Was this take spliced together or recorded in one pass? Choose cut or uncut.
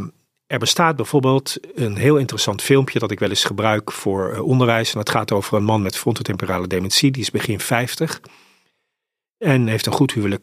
uncut